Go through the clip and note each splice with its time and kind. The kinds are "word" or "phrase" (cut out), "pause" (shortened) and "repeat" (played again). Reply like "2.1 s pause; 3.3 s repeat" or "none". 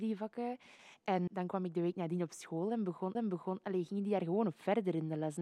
1.3 s word; 3.1 s repeat